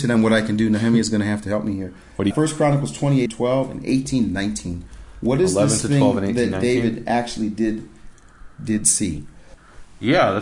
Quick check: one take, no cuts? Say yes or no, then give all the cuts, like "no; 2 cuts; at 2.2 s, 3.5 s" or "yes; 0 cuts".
no; 2 cuts; at 2.3 s, 3.3 s